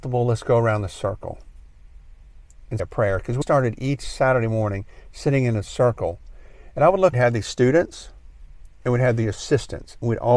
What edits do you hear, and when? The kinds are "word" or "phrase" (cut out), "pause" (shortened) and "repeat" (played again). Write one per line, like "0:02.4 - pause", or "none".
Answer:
0:02.8 - phrase
0:03.4 - word
0:07.1 - phrase